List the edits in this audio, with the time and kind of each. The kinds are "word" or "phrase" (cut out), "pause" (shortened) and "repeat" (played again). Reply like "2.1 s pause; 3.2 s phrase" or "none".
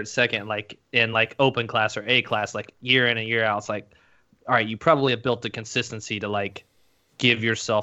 none